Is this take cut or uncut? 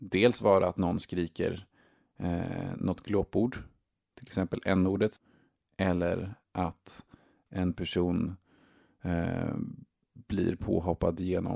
uncut